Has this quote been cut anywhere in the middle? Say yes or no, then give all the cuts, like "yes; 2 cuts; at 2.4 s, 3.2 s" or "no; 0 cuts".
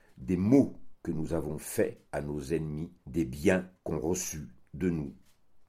yes; 3 cuts; at 2.1 s, 3.0 s, 3.8 s